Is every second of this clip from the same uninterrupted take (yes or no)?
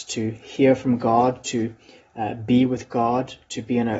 yes